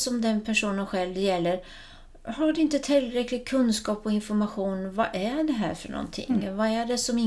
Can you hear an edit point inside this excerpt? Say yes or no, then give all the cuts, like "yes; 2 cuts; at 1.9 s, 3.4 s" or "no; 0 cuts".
no; 0 cuts